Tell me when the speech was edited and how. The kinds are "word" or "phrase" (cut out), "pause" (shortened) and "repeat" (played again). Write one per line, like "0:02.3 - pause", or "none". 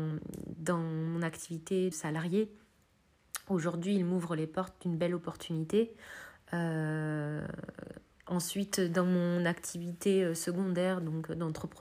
0:01.9 - word